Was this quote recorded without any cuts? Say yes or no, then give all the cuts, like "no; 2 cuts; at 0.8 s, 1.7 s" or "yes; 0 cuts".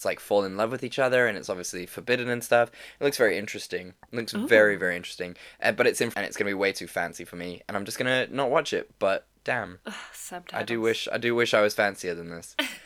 no; 2 cuts; at 6.1 s, 9.4 s